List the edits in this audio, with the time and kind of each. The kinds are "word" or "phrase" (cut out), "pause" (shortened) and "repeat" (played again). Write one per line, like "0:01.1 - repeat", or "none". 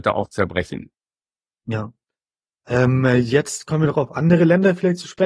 none